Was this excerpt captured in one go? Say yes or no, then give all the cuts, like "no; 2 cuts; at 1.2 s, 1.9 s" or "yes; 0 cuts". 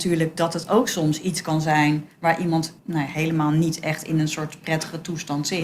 no; 1 cut; at 2.8 s